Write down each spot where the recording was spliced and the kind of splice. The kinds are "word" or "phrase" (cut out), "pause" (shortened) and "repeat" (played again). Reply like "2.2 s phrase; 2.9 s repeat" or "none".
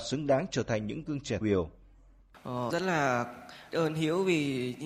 1.1 s word; 1.4 s word; 2.7 s word; 3.7 s word